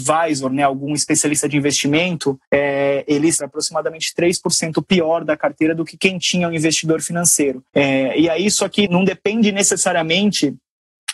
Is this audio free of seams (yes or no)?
no